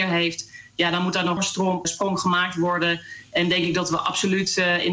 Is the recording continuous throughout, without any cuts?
no; 2 cuts; at 1.4 s, 1.8 s

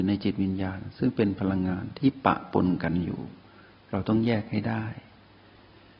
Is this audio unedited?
yes; 0 cuts

